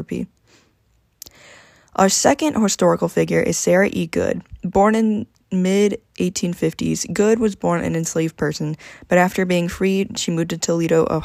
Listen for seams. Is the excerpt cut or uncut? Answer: uncut